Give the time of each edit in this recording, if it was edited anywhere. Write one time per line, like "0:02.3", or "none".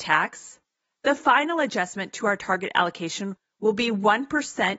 none